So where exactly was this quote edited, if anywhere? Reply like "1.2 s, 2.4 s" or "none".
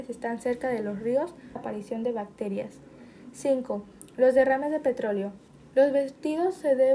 1.6 s, 5.5 s